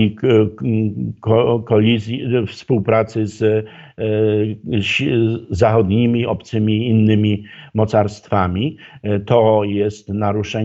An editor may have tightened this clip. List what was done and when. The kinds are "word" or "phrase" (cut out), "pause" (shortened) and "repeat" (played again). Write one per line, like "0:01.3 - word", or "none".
none